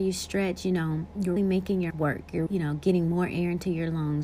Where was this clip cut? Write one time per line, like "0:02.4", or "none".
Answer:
0:01.4
0:01.9
0:02.5